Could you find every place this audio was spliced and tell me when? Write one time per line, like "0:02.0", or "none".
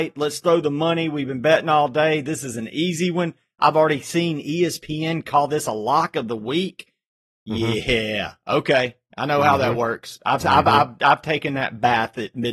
0:11.0